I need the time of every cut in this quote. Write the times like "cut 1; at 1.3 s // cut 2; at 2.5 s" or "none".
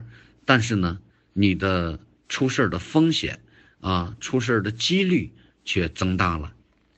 none